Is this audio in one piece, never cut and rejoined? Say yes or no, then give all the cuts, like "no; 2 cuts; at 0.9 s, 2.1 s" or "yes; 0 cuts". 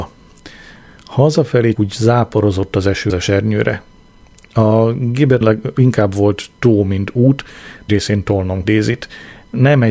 no; 5 cuts; at 1.7 s, 3.1 s, 5.4 s, 7.9 s, 8.6 s